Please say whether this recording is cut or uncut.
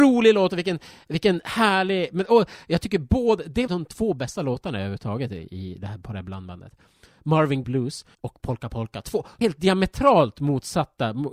cut